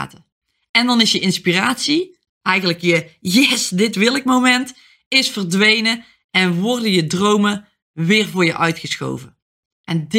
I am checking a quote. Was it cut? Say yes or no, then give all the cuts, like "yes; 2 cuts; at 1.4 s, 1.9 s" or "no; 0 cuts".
no; 0 cuts